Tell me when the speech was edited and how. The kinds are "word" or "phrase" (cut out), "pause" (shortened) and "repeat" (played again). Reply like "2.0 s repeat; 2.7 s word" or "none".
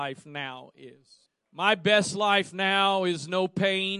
1.3 s pause